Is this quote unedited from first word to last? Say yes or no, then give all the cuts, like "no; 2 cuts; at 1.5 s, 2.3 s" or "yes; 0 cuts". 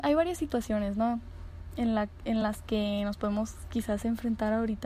yes; 0 cuts